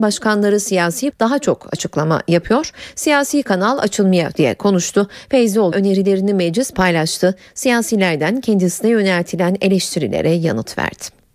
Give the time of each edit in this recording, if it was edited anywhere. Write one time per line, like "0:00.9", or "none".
0:01.1
0:04.3
0:05.7
0:06.7